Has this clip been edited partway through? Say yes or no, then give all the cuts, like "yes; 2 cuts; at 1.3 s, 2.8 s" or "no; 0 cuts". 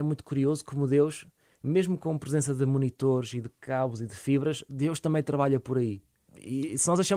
no; 0 cuts